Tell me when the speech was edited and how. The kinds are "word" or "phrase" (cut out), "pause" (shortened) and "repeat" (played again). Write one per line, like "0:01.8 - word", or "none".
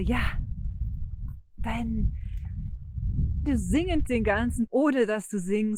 0:03.4 - word
0:04.0 - word
0:04.7 - word